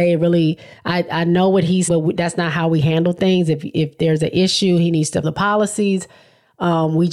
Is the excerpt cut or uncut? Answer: cut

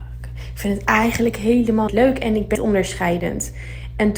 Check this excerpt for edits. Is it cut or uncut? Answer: cut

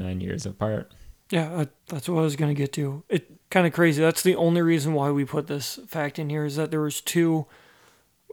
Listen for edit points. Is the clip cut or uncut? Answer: cut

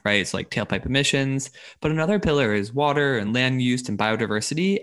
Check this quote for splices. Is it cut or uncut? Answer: uncut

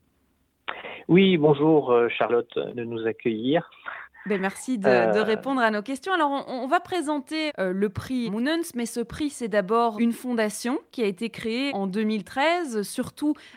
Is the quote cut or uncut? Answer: cut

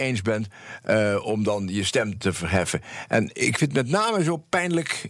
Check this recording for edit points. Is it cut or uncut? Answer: uncut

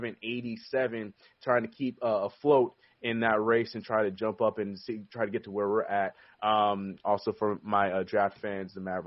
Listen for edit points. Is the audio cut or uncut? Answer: uncut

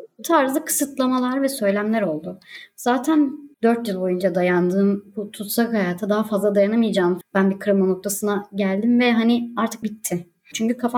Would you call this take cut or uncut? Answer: cut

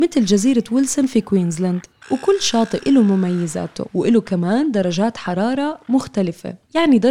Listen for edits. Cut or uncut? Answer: cut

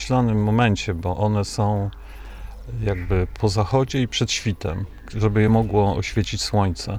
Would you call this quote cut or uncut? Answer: uncut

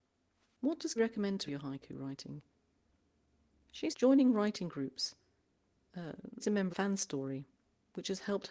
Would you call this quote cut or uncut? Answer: cut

